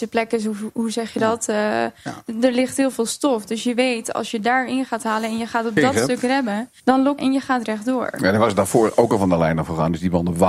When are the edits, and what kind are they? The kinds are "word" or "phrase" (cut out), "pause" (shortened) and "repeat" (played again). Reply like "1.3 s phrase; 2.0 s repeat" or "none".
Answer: 6.8 s pause; 7.2 s phrase